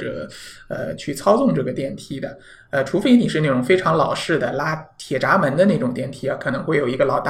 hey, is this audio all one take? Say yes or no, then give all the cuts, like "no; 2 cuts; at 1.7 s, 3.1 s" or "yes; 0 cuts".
yes; 0 cuts